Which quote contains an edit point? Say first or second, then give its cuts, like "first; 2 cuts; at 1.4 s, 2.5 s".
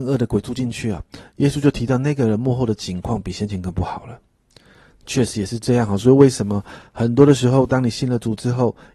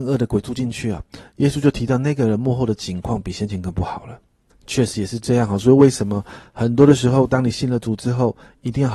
second; 1 cut; at 4.5 s